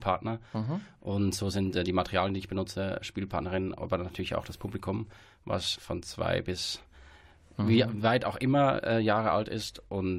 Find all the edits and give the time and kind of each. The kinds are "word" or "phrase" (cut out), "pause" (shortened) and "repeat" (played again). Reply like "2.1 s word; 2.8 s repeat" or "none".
5.8 s word